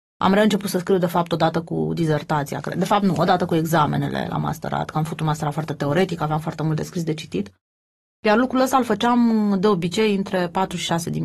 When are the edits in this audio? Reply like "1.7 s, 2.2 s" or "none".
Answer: none